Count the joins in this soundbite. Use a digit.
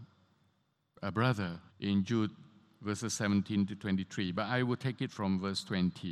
1